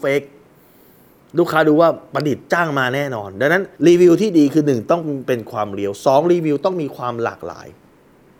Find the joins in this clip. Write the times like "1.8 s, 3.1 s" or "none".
3.8 s